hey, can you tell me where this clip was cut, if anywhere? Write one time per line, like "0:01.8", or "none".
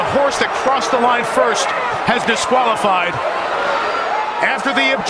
0:02.3